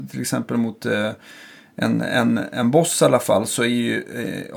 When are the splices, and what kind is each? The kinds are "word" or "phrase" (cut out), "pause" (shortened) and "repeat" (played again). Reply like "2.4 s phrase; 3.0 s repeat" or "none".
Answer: none